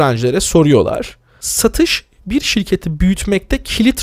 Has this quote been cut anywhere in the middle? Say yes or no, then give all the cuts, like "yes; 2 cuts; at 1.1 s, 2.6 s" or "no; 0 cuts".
no; 0 cuts